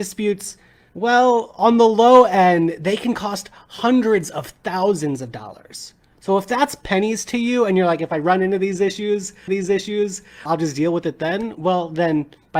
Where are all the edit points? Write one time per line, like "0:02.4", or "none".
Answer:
0:09.5